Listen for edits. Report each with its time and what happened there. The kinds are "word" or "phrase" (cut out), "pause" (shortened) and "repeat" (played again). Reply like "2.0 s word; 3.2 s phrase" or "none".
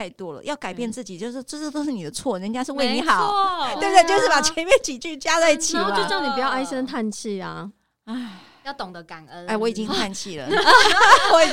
none